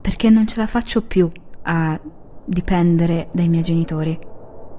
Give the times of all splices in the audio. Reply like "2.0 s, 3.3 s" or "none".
none